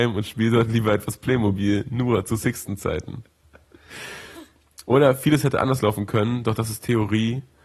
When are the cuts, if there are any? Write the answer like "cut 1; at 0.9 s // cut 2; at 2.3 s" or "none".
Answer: none